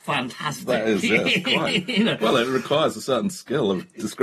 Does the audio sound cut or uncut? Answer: uncut